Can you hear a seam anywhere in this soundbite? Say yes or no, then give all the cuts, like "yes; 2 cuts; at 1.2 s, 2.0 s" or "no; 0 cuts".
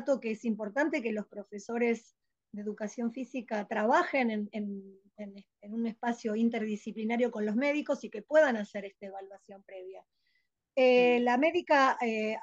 no; 0 cuts